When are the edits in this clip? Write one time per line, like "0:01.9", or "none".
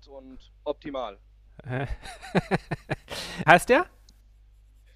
0:03.5